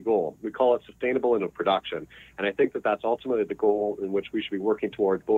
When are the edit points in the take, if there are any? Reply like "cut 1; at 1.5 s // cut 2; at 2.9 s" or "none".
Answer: cut 1; at 1.4 s